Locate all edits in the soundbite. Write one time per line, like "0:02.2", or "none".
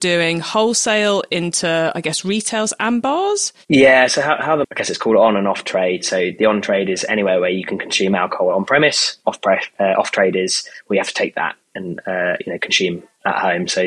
0:03.6
0:04.6
0:09.8